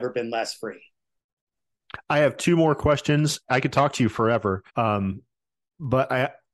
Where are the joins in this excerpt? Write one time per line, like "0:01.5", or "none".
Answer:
0:04.7